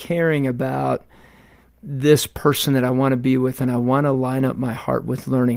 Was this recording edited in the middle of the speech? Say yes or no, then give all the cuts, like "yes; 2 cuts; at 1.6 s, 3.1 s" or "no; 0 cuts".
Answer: no; 0 cuts